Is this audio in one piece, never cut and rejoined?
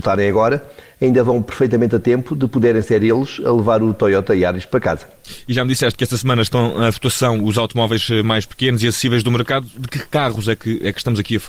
yes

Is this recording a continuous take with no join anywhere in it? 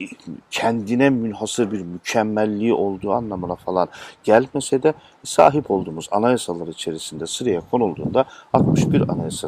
yes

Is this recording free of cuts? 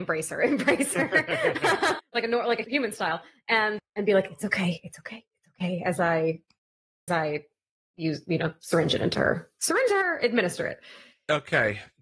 no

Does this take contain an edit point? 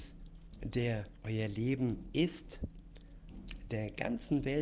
no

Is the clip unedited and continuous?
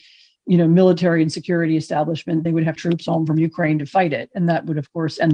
no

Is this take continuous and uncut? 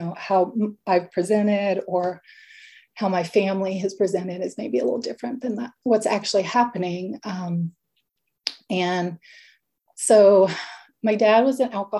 yes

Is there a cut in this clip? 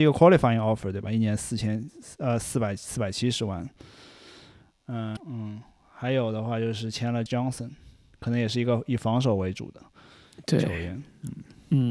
yes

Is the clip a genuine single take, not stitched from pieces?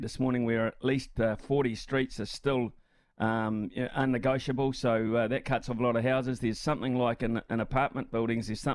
yes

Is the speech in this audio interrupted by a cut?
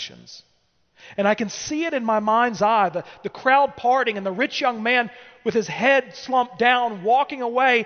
no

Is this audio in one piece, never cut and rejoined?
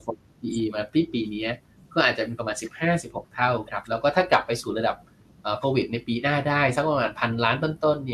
no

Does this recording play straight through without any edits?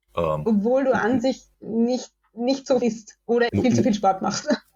no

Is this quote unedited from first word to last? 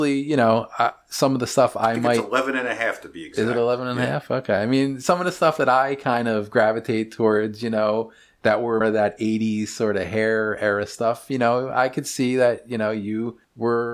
no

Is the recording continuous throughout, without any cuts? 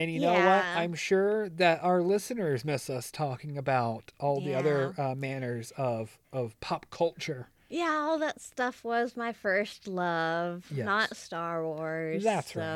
no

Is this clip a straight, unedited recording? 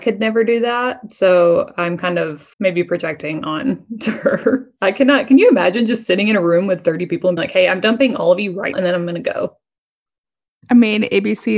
no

